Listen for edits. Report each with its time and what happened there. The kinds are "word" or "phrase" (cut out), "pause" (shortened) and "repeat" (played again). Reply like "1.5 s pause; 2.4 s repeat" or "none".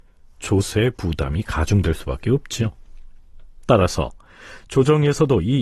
none

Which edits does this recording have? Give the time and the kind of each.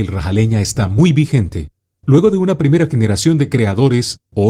none

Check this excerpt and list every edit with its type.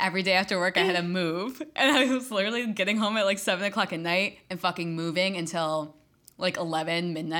none

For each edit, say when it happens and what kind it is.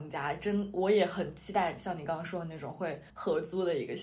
3.1 s pause

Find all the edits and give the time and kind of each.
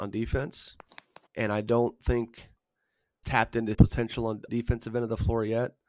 1.3 s pause; 3.2 s word; 3.7 s phrase; 4.5 s phrase

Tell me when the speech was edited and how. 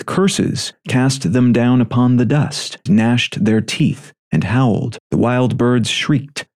2.9 s word; 5.0 s pause

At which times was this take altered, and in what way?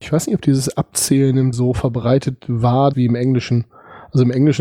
1.5 s word; 2.9 s word

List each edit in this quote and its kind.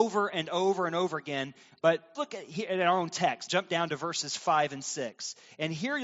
2.2 s word; 3.5 s word

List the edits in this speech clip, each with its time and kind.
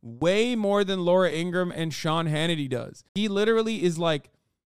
3.1 s pause

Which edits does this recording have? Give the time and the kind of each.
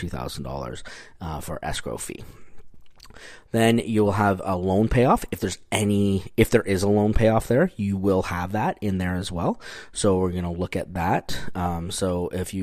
none

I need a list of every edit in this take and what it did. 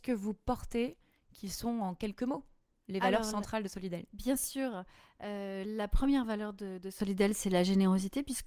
none

